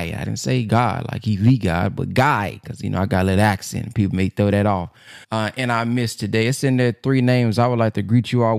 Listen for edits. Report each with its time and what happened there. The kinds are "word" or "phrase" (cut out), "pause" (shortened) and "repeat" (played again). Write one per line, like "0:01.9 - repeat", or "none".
0:05.2 - pause